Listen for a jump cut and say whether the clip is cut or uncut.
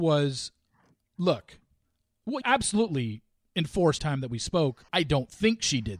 cut